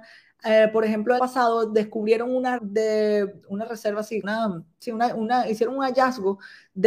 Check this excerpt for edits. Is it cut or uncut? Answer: cut